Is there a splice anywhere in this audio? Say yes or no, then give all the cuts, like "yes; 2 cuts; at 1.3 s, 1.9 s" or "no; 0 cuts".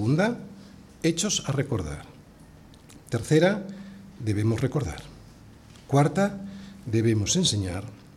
no; 0 cuts